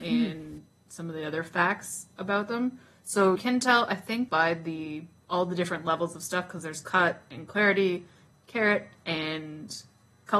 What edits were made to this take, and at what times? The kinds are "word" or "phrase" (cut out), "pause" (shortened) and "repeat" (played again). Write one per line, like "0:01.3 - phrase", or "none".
0:03.4 - word
0:04.3 - word